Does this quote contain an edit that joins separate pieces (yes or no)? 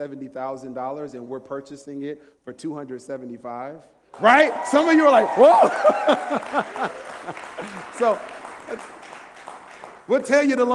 no